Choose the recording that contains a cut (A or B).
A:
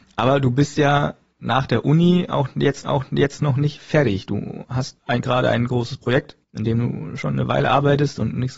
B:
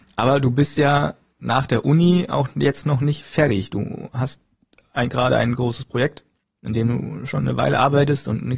A